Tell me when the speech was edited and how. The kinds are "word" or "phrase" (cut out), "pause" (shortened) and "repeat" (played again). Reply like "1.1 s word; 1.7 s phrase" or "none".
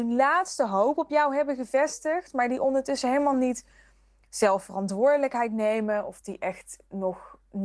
none